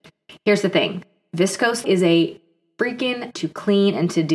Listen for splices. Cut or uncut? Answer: cut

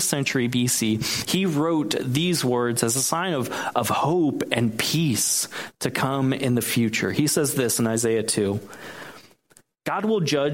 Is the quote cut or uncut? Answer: uncut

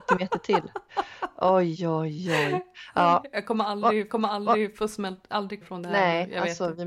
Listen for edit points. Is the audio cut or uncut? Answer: cut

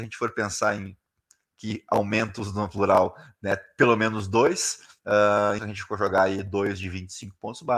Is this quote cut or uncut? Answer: cut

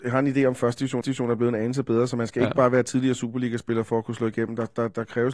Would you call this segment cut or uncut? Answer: cut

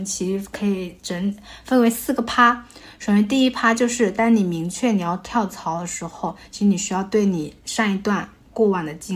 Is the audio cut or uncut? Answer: uncut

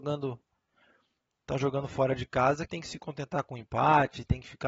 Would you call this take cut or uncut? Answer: cut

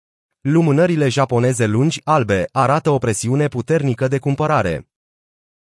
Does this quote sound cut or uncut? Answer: uncut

